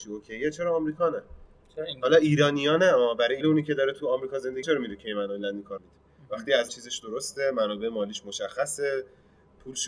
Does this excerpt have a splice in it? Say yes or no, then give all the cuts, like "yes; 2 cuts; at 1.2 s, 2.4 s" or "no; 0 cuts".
yes; 4 cuts; at 3.4 s, 4.6 s, 5.8 s, 6.7 s